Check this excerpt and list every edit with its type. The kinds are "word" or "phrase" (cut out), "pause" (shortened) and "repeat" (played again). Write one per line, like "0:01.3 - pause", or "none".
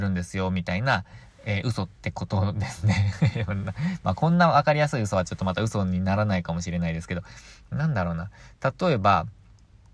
0:01.9 - pause